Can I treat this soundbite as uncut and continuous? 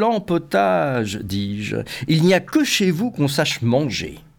yes; 0 cuts

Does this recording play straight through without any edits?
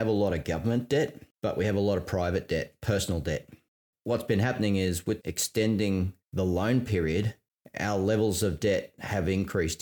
no; 1 cut; at 5.2 s

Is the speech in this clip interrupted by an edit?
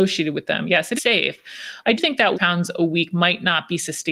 yes; 3 cuts; at 1.0 s, 2.0 s, 2.3 s

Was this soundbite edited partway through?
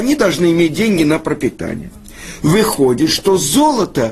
no; 0 cuts

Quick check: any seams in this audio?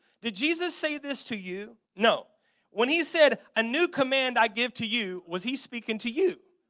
yes; 1 cut; at 1.9 s

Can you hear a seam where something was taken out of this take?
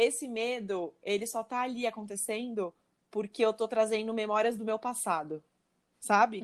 no; 0 cuts

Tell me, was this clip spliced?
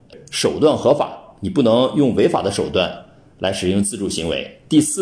no; 0 cuts

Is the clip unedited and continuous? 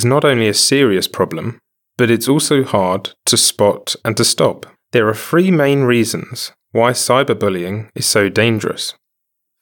no; 1 cut; at 4.8 s

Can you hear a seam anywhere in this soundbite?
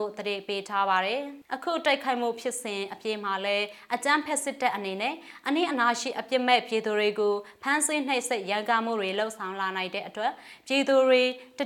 yes; 1 cut; at 1.5 s

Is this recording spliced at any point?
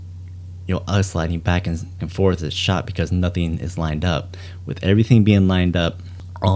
yes; 2 cuts; at 2.0 s, 2.4 s

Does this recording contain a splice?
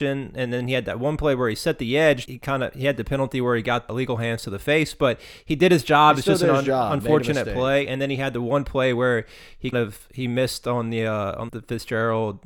yes; 4 cuts; at 2.3 s, 3.9 s, 9.7 s, 11.5 s

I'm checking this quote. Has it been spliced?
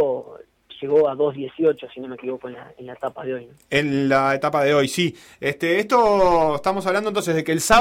no; 0 cuts

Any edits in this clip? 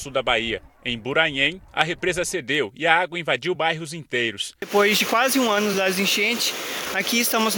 no; 0 cuts

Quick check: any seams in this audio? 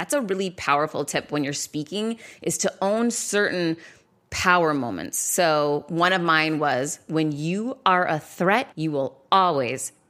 yes; 1 cut; at 8.7 s

